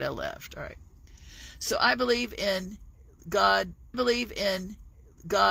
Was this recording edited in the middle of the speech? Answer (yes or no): yes